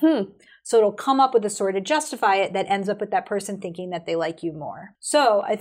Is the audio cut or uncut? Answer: uncut